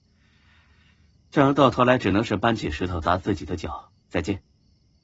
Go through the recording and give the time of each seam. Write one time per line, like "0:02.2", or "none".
0:04.0